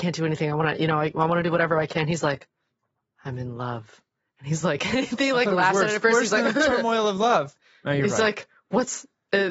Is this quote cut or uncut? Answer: uncut